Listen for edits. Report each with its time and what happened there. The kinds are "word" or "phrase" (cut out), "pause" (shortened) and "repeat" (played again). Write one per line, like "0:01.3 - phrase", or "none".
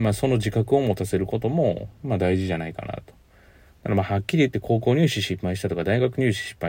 none